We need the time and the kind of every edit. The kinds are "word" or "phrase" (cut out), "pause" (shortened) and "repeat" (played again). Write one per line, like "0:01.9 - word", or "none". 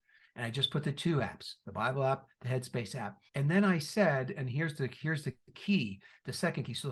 0:03.3 - pause